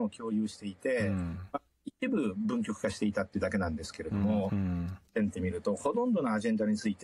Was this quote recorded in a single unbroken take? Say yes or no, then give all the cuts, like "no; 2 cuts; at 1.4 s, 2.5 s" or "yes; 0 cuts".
no; 1 cut; at 5.1 s